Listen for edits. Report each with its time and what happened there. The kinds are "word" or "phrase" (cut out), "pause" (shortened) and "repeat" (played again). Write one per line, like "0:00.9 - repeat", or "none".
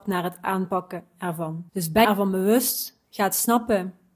0:01.7 - pause
0:02.0 - word